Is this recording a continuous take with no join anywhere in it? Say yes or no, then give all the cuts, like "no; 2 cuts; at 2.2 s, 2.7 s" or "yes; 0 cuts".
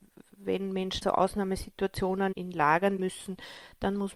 no; 3 cuts; at 1.0 s, 2.3 s, 3.0 s